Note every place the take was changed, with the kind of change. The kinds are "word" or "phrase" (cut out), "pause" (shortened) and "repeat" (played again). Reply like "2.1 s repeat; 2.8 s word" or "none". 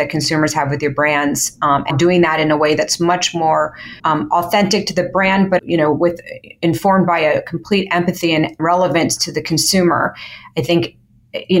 1.9 s word; 4.0 s pause; 5.6 s word; 8.6 s word